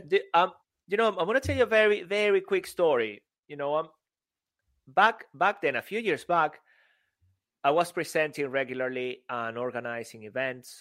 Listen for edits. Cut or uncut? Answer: uncut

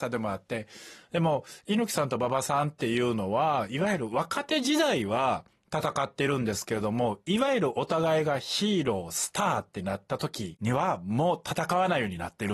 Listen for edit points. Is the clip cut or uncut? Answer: cut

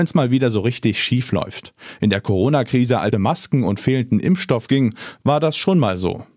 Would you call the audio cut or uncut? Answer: cut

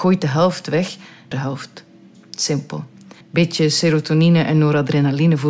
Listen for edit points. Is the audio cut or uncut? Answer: cut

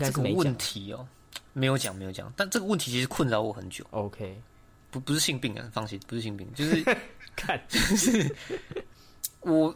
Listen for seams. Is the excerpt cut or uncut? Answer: uncut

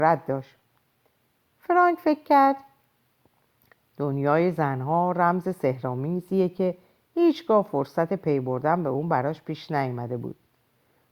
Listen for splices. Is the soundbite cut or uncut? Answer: uncut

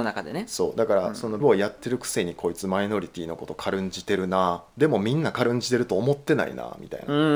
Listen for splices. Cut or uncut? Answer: cut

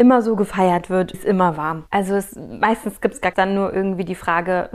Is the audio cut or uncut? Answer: cut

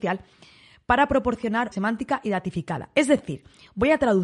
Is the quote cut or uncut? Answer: cut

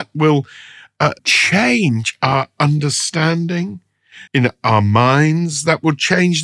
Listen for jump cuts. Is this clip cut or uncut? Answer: cut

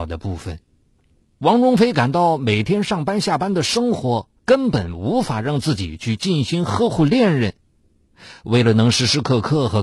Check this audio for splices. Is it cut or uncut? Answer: cut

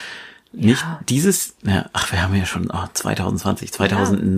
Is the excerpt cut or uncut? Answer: uncut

